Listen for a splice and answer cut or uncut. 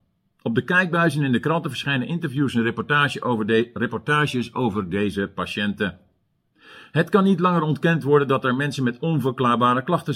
uncut